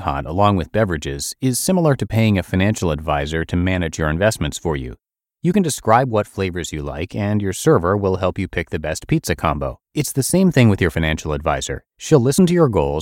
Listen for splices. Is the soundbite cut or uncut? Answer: cut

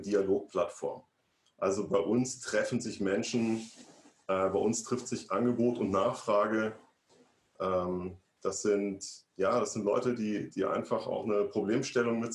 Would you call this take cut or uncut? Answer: uncut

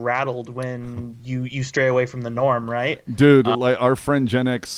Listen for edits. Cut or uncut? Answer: uncut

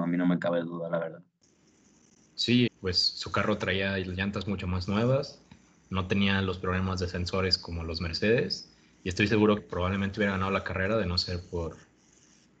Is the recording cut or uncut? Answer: cut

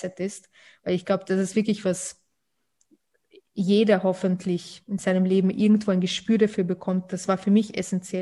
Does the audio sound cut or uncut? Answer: cut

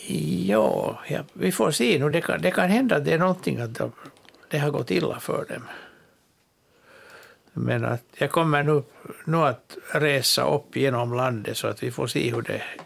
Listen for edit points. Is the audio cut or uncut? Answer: uncut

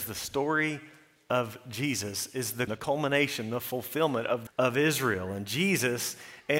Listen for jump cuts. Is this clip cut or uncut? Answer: cut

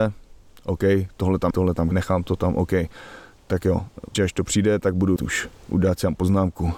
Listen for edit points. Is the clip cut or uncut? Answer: cut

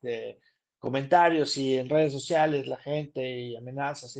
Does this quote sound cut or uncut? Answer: uncut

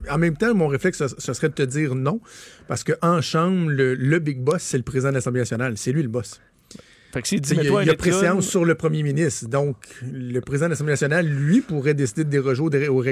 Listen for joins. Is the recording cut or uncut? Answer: uncut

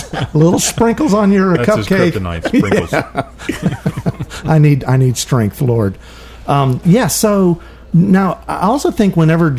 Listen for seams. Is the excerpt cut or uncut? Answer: uncut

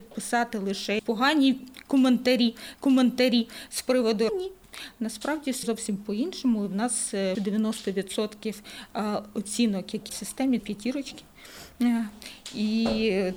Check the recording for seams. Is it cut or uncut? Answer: cut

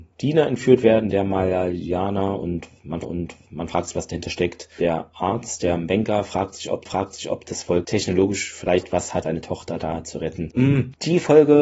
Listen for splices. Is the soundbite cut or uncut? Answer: cut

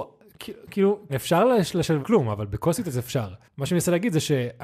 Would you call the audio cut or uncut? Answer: cut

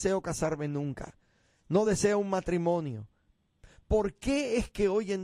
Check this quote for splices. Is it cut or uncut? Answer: uncut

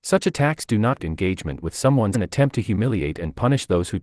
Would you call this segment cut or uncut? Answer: cut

